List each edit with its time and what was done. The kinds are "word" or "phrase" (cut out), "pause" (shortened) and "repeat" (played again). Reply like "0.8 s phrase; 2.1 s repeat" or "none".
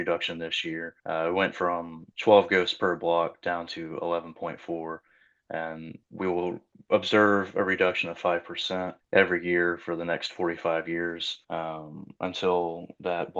1.0 s pause; 2.1 s pause; 6.0 s pause; 6.7 s pause; 9.0 s pause; 11.4 s pause